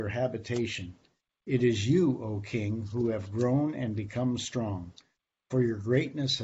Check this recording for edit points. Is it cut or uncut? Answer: uncut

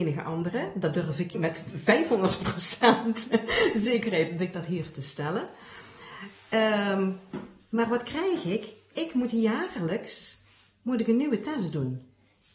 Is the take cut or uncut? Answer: cut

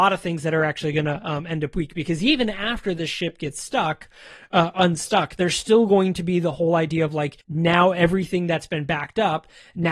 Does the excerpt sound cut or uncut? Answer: cut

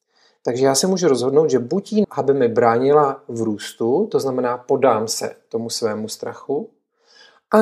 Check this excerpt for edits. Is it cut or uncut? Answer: cut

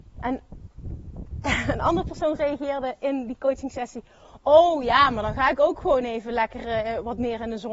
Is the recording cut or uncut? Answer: uncut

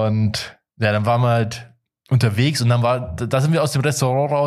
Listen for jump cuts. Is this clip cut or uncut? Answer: uncut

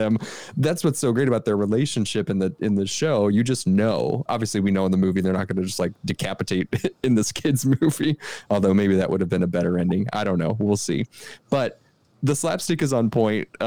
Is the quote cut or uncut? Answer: cut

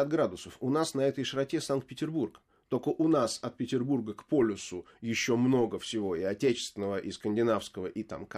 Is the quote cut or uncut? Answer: uncut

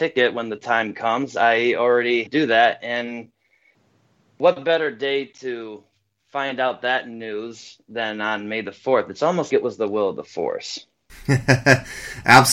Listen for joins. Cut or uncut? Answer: cut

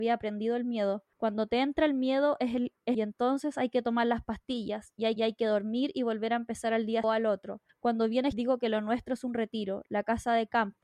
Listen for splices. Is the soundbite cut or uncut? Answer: cut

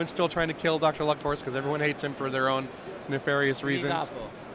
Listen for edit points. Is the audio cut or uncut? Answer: cut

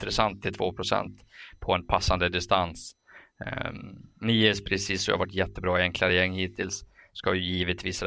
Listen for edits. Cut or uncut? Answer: uncut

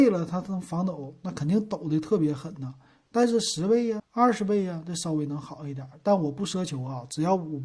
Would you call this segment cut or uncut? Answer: cut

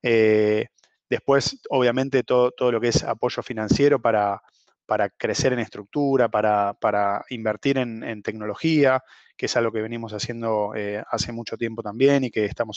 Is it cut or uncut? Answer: uncut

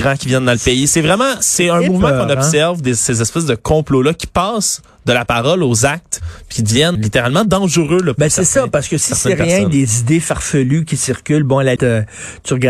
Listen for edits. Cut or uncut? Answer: cut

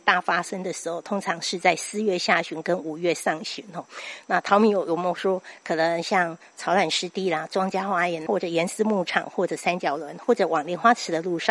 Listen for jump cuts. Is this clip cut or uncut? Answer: cut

